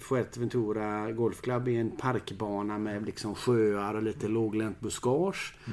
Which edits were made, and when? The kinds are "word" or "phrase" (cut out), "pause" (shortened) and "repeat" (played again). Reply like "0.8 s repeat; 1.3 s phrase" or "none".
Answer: none